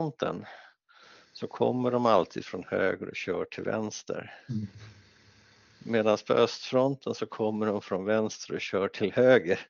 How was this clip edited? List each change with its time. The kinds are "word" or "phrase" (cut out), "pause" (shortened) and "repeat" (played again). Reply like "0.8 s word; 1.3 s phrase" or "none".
none